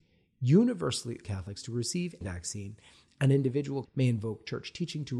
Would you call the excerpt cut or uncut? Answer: cut